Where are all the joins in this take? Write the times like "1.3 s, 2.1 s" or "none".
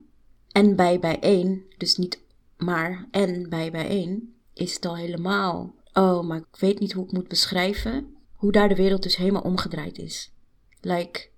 4.4 s, 5.8 s, 6.4 s, 8.2 s